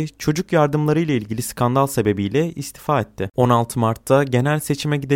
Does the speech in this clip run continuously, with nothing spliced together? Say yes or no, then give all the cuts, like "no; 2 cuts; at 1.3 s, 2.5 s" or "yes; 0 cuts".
yes; 0 cuts